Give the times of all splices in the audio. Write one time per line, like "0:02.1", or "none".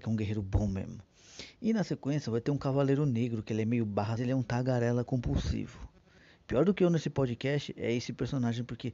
0:04.2